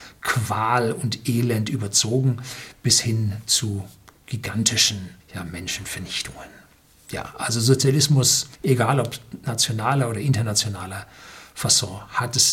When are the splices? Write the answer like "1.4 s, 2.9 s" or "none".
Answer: 5.2 s, 8.5 s